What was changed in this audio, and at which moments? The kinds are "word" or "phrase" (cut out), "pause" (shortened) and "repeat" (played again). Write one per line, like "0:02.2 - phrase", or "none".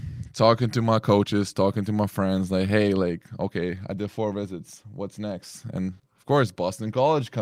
0:06.0 - pause